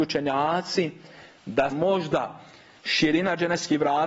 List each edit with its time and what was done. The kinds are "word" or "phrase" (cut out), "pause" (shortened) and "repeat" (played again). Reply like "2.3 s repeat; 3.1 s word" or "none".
1.7 s word